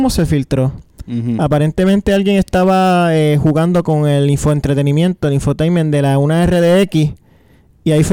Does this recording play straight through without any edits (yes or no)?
yes